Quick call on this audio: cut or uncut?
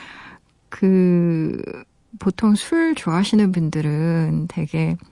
uncut